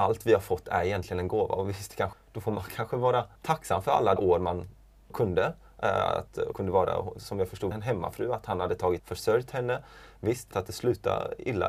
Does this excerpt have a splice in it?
yes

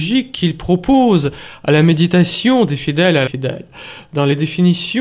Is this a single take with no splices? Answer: no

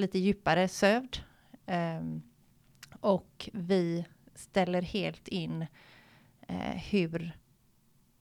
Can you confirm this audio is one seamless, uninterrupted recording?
yes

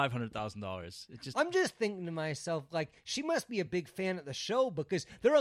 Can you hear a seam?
no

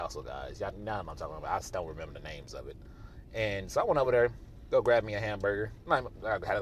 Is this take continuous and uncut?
yes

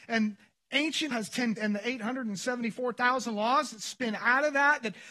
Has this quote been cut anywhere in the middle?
yes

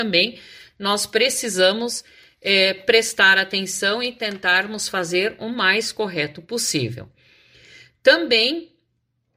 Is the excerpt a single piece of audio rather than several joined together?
yes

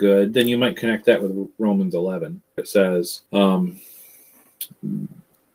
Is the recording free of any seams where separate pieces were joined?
no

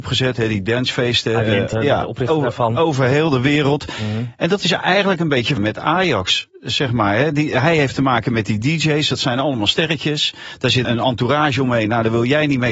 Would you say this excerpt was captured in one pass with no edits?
no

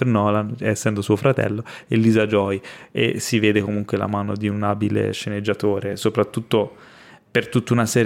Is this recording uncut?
yes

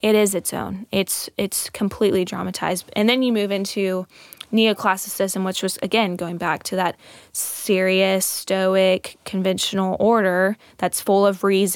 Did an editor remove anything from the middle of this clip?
no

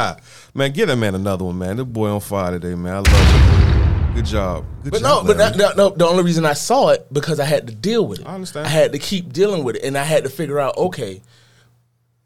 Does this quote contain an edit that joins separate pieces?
no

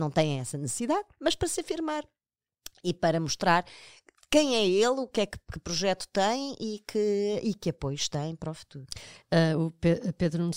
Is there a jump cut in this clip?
no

